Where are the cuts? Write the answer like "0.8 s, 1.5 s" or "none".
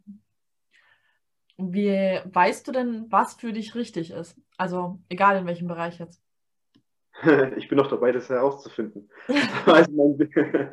none

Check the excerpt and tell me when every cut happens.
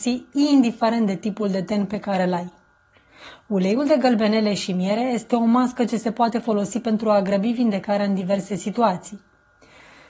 none

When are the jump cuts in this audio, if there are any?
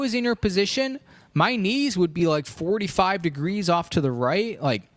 none

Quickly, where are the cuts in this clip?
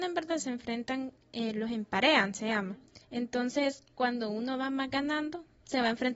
3.0 s

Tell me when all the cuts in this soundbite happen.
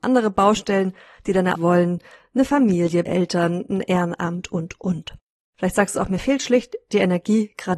1.5 s, 3.0 s, 4.5 s

